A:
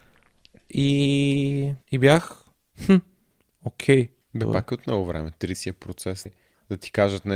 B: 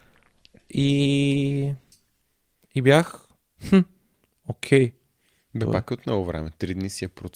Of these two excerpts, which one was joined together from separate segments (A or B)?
A